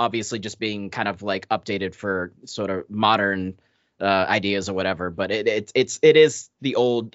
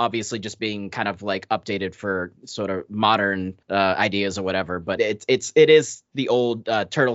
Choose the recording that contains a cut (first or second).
second